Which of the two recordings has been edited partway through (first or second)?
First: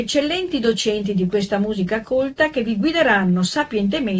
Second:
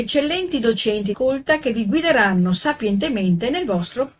second